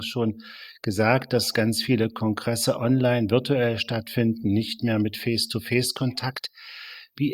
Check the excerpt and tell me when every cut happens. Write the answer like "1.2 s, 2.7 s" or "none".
none